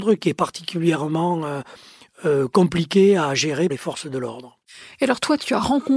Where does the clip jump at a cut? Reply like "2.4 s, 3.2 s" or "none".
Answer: 3.7 s